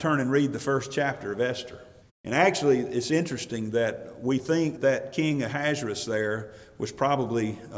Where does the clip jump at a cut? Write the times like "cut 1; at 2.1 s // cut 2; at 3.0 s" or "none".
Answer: cut 1; at 2.0 s // cut 2; at 4.8 s